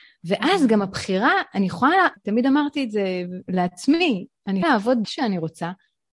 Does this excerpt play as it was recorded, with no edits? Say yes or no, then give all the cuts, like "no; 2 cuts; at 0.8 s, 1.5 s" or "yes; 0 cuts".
no; 3 cuts; at 2.2 s, 4.6 s, 5.0 s